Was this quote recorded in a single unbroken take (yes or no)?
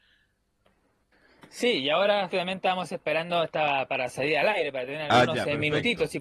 no